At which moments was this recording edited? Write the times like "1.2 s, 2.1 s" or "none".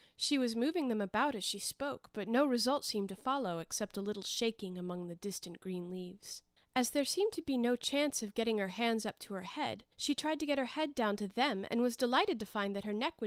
6.6 s, 9.9 s